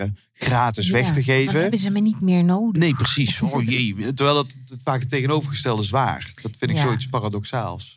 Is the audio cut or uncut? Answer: uncut